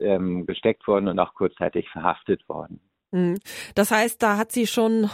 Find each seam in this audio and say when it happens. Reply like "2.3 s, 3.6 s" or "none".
none